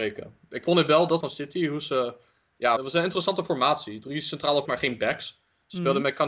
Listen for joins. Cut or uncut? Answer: cut